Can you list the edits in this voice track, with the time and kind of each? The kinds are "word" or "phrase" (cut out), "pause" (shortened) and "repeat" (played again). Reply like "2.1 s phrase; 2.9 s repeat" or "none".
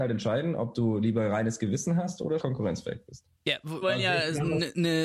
2.4 s word; 3.8 s word